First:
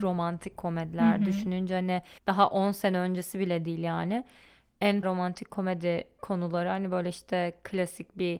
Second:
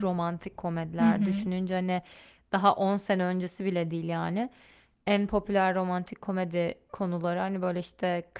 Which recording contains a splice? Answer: first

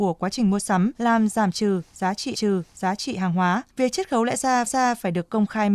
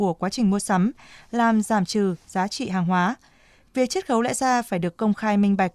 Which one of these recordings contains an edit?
first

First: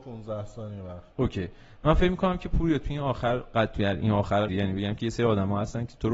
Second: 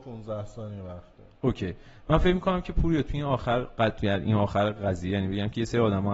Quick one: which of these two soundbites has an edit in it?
first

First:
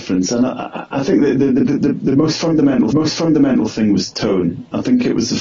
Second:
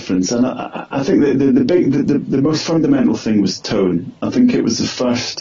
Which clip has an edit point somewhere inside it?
first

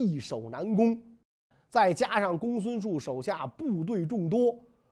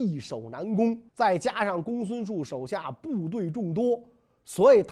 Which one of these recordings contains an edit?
second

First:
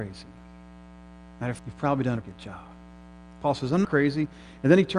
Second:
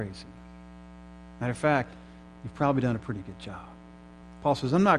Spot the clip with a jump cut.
first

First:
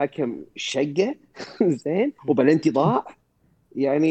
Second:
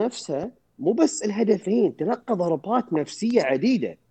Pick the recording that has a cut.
first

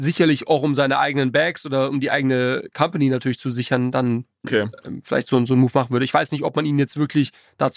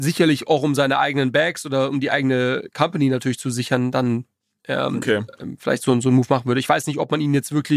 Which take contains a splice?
first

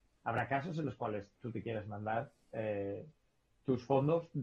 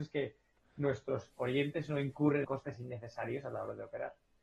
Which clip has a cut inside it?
second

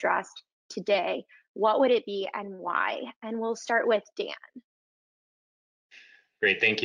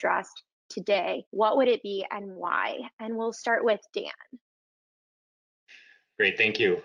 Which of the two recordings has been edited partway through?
second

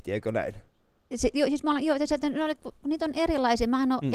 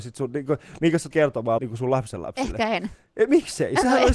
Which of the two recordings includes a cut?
second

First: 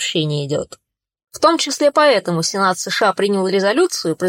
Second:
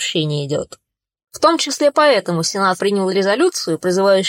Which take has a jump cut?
second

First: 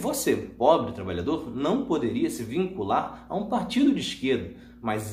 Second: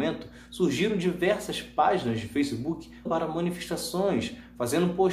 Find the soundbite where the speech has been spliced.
second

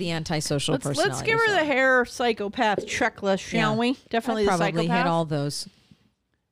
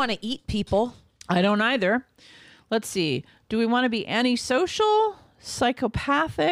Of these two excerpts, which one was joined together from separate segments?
first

